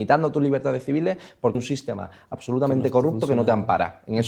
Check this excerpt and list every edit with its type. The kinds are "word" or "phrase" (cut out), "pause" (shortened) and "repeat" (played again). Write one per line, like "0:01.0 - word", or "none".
0:01.5 - word